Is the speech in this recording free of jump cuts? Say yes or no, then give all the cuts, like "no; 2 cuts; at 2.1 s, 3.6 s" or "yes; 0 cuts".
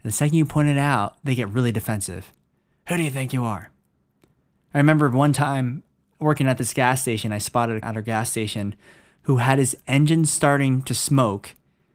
no; 1 cut; at 7.8 s